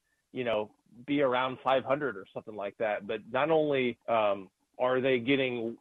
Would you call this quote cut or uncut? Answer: cut